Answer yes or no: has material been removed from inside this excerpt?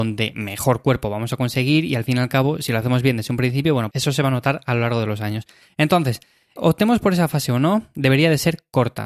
yes